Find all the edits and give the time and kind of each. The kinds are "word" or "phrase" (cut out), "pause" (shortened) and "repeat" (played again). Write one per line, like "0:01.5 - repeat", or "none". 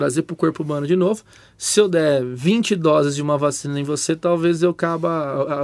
none